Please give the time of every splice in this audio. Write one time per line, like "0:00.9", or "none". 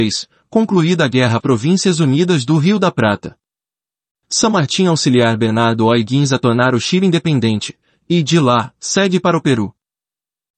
0:01.4